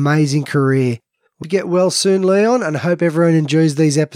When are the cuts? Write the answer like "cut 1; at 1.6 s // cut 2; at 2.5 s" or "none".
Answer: cut 1; at 1.4 s